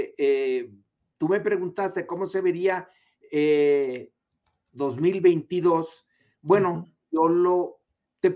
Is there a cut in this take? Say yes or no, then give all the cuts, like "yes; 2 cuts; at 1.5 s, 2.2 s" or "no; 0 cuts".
no; 0 cuts